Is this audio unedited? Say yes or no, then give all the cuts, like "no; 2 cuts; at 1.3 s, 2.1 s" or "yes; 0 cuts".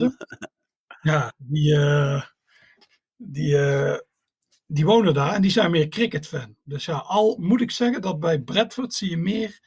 yes; 0 cuts